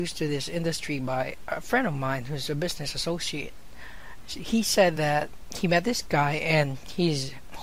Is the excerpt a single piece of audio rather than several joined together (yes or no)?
yes